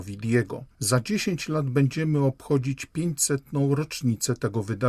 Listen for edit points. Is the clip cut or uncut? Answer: uncut